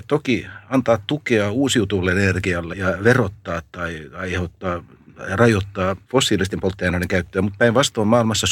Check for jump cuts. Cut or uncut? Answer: cut